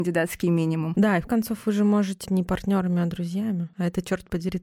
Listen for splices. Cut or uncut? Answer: cut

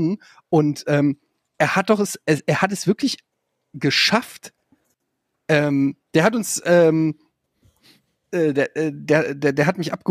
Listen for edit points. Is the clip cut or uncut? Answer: uncut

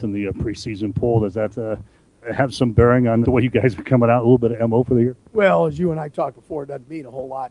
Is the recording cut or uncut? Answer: cut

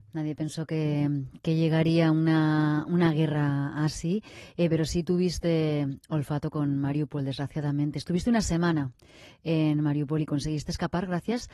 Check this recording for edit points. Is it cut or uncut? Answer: uncut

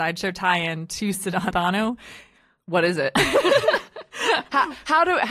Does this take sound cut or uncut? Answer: cut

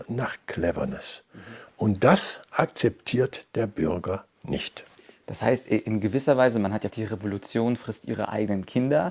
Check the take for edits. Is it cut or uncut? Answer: cut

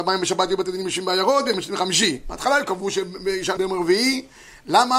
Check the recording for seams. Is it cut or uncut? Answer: cut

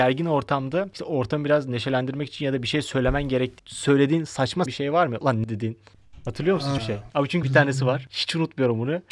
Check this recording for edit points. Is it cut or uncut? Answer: cut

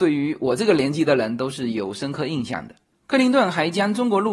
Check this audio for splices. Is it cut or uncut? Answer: uncut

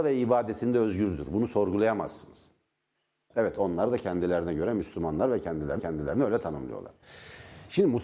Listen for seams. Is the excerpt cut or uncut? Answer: cut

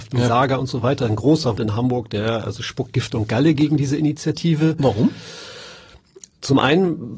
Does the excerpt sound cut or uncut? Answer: cut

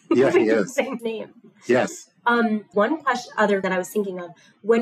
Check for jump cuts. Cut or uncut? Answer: cut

